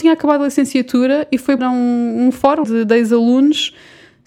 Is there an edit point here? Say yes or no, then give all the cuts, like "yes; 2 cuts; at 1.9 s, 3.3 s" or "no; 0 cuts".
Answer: yes; 2 cuts; at 1.6 s, 2.6 s